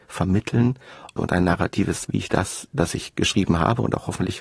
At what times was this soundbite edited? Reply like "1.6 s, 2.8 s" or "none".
1.2 s, 2.0 s